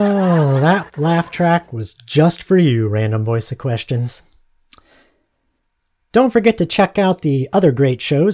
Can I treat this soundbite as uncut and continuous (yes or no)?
yes